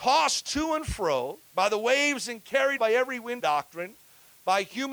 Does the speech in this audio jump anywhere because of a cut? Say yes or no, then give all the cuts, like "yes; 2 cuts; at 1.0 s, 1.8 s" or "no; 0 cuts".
yes; 3 cuts; at 1.5 s, 2.8 s, 3.4 s